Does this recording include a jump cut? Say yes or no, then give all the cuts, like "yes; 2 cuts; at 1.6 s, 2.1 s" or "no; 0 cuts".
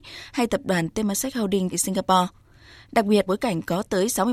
yes; 2 cuts; at 1.7 s, 3.3 s